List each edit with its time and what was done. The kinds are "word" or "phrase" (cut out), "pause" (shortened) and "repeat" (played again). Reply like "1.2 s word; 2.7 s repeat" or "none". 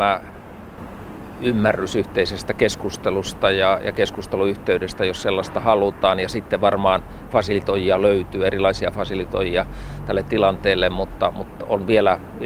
none